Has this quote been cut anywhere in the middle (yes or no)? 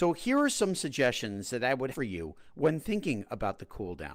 yes